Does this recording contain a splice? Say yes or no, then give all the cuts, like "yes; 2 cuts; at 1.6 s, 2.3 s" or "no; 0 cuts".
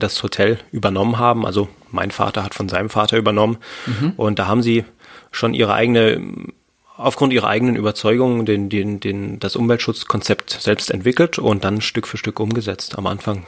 no; 0 cuts